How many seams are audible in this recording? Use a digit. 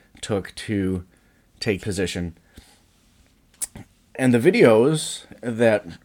1